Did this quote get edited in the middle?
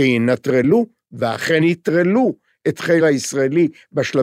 yes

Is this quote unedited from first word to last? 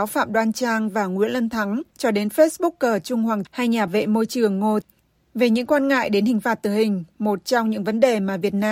no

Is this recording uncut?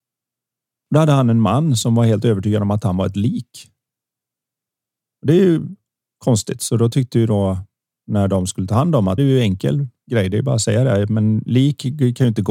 no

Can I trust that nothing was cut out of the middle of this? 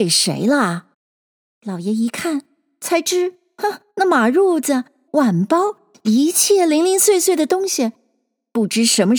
no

